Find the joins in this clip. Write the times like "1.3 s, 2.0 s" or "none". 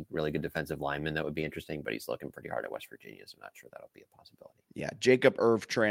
4.6 s